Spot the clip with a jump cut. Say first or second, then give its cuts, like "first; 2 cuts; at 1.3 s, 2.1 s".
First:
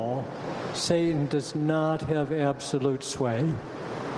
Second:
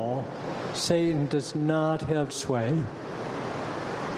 second; 1 cut; at 2.3 s